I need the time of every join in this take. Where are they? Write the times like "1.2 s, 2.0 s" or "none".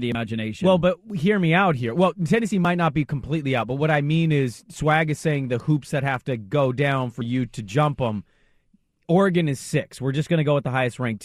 none